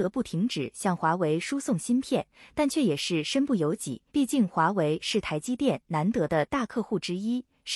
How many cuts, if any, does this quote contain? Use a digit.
1